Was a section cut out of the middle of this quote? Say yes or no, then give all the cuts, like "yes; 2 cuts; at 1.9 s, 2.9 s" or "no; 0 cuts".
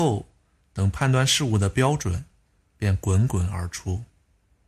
no; 0 cuts